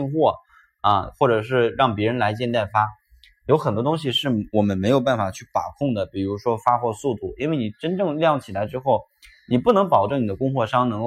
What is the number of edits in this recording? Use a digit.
0